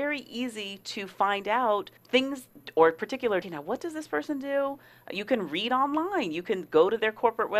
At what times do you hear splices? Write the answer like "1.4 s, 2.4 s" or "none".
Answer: 2.0 s, 3.4 s